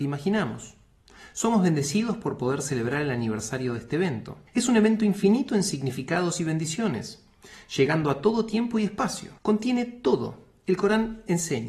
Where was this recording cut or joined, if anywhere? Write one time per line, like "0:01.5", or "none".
0:04.5
0:09.4